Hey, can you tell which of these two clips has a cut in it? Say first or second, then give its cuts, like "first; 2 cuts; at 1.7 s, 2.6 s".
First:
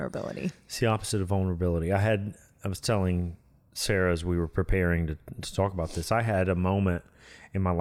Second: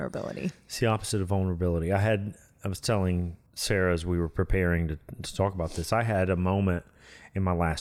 second; 1 cut; at 3.5 s